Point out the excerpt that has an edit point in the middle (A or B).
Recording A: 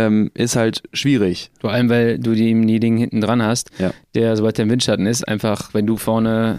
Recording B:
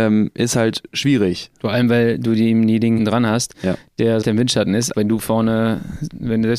B